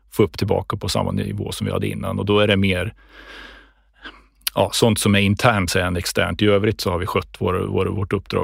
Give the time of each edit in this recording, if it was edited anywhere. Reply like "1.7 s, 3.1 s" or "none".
5.7 s